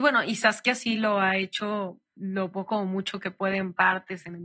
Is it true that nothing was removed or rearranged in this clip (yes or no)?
no